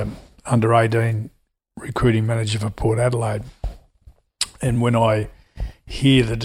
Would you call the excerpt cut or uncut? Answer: uncut